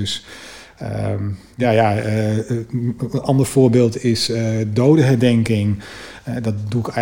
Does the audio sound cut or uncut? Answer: uncut